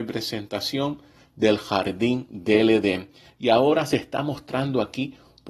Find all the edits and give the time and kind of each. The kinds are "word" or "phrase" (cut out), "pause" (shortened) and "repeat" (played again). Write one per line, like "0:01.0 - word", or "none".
none